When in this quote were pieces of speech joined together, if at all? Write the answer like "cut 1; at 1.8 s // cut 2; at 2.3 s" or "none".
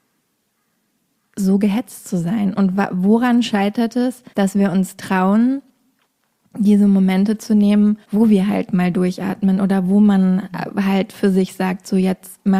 cut 1; at 4.3 s // cut 2; at 8.0 s